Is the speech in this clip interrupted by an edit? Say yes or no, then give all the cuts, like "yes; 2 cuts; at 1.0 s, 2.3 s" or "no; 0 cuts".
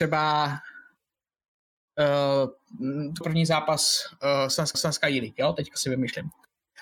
yes; 2 cuts; at 3.2 s, 4.7 s